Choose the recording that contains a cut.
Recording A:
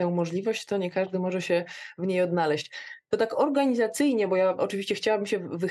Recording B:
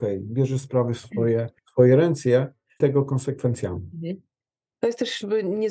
B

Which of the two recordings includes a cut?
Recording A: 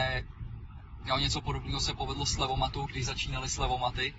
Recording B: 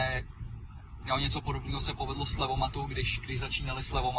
A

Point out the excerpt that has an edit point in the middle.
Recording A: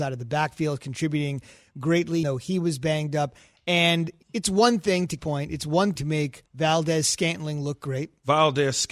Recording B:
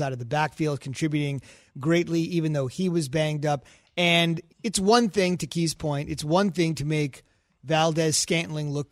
A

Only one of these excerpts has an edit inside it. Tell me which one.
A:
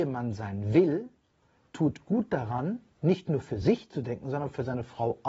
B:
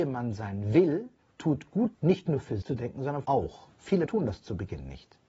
B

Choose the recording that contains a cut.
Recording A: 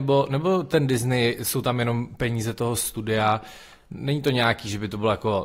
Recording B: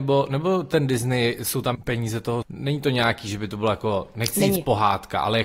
B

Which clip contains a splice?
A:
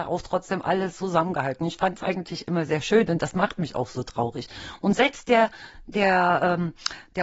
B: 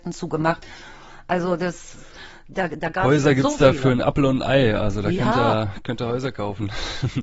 A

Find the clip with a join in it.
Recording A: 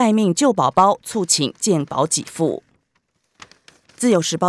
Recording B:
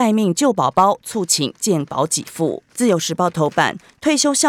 B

